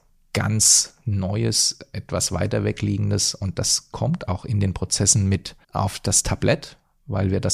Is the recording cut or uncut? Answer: cut